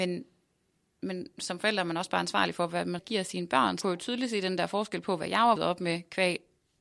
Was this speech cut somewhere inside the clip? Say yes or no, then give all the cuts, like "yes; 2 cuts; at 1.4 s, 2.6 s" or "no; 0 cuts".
yes; 3 cuts; at 3.0 s, 3.8 s, 5.6 s